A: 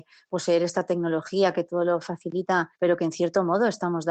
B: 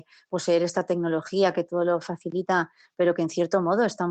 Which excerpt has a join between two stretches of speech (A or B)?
A